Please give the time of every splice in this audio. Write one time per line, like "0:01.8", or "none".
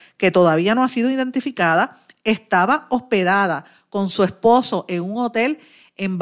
none